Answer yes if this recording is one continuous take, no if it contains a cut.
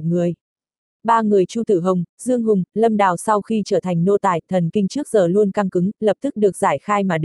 yes